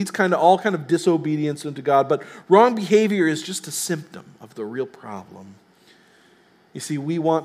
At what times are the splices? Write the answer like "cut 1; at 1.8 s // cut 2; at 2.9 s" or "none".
none